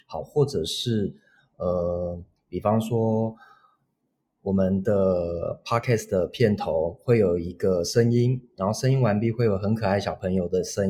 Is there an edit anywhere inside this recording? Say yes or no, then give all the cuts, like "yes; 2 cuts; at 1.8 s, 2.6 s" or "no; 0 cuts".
no; 0 cuts